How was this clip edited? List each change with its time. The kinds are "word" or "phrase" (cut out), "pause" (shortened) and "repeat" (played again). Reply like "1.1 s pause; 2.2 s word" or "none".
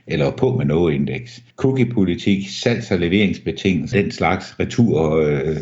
1.5 s pause; 3.9 s word